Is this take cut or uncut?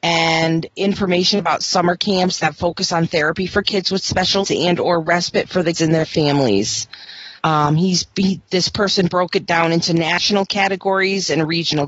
cut